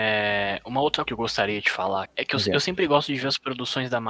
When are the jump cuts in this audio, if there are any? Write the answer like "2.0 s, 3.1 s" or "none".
1.1 s, 2.1 s